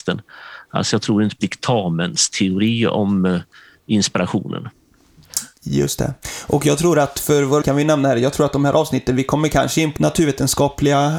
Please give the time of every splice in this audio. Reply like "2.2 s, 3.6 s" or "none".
1.4 s, 7.6 s, 10.0 s